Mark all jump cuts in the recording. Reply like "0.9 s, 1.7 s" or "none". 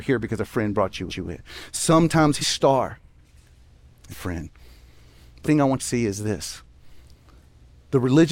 1.1 s, 2.4 s, 4.1 s, 5.4 s, 5.8 s